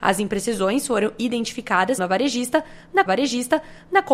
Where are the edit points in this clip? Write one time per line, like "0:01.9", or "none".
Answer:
0:02.0
0:03.1

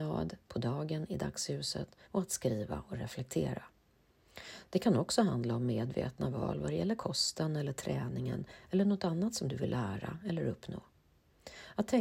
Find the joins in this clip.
0:02.0

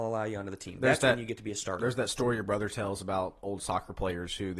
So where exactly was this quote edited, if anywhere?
none

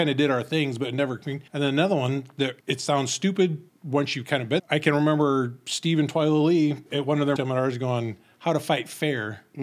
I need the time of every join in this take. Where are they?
0:01.5
0:02.6
0:03.7
0:04.6
0:06.9
0:07.4

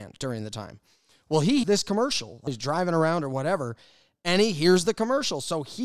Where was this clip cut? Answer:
0:01.6
0:02.5

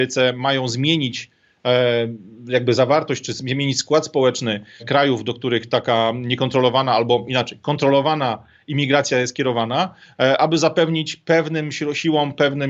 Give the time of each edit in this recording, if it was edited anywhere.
0:04.8

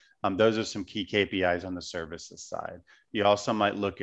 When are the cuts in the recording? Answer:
none

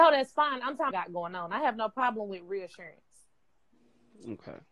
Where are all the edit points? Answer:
0:00.9

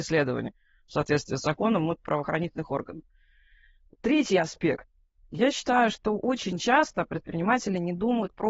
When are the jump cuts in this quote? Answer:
none

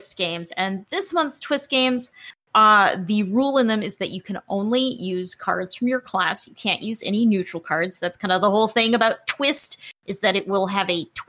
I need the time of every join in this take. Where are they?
none

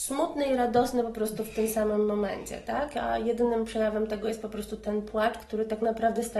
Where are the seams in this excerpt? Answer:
none

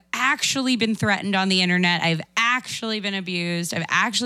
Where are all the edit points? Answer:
none

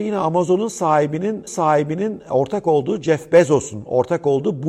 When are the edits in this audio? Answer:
0:01.5

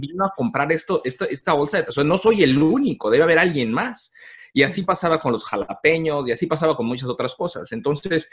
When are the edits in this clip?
0:01.9

